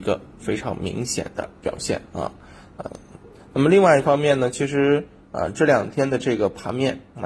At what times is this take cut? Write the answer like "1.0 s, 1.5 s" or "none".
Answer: none